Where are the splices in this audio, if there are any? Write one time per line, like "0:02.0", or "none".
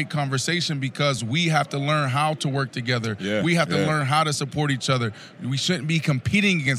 none